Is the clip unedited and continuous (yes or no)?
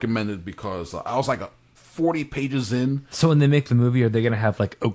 yes